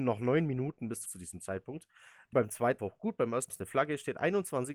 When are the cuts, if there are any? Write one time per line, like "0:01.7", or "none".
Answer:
0:01.1
0:02.3
0:02.8
0:03.5

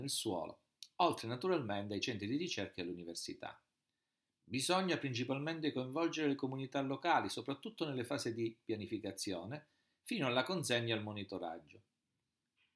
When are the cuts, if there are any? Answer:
none

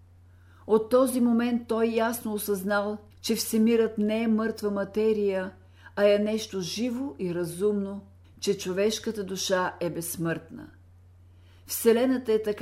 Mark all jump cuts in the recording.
0:03.1
0:08.2

